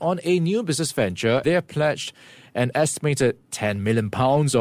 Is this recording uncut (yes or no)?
no